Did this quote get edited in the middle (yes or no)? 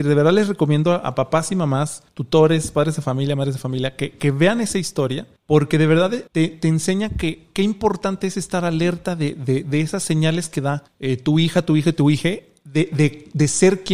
yes